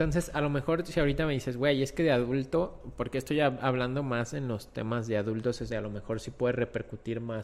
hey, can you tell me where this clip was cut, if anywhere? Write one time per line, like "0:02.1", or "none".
0:05.7